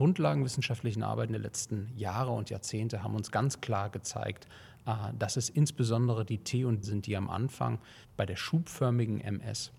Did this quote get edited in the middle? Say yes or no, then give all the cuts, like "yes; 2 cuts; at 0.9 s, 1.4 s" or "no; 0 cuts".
yes; 2 cuts; at 6.8 s, 8.0 s